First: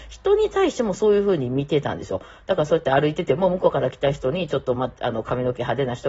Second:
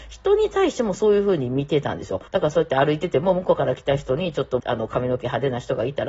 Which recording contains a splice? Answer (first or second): second